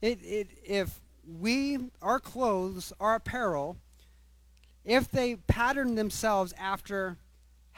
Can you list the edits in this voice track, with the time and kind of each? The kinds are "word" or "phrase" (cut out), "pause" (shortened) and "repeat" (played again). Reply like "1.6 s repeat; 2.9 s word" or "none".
none

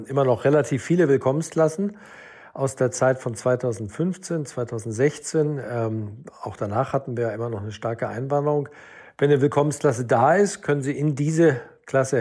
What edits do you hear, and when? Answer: none

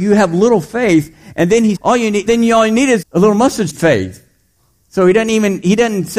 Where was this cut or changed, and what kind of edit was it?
1.8 s word; 2.3 s word; 3.0 s word; 3.7 s word

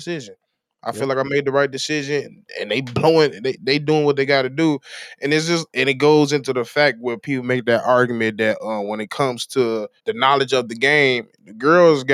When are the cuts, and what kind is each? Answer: 10.0 s pause

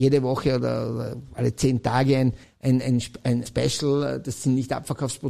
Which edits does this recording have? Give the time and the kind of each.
2.4 s pause; 3.4 s word

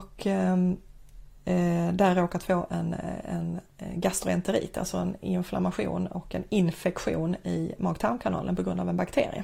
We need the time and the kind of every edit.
none

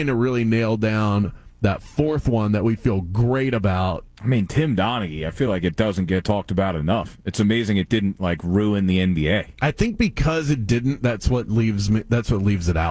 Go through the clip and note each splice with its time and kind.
none

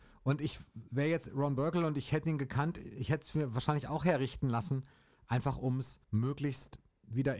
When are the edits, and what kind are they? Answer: 6.0 s pause

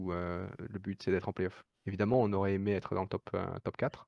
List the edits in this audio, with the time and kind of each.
1.7 s pause

